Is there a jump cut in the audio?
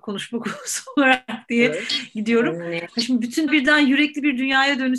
yes; 1 cut; at 3.5 s

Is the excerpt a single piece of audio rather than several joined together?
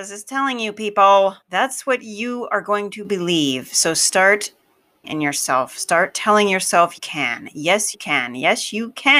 no; 4 cuts; at 1.4 s, 5.0 s, 7.0 s, 7.9 s

